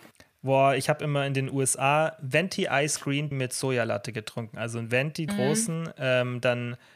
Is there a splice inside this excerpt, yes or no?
yes